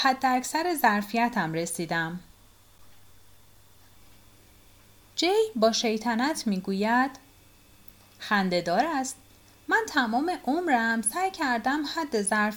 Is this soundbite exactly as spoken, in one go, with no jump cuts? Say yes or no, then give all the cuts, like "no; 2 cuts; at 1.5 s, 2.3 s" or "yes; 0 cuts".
yes; 0 cuts